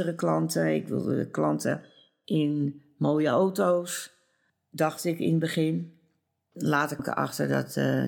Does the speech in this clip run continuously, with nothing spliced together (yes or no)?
no